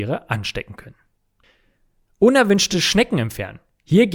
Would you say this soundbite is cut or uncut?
uncut